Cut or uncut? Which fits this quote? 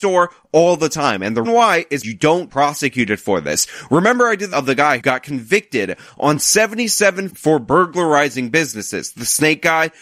cut